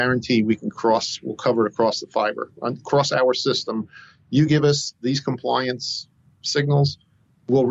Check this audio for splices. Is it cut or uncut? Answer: uncut